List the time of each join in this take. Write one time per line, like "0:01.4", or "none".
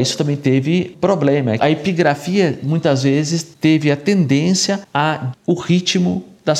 0:00.9
0:01.6
0:05.3